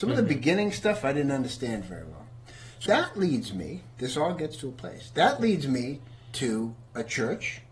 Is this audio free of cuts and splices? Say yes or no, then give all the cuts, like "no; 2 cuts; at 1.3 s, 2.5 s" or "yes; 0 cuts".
no; 1 cut; at 2.9 s